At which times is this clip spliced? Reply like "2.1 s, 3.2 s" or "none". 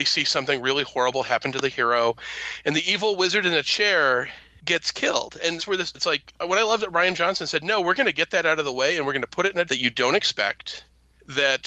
5.6 s, 5.9 s, 9.6 s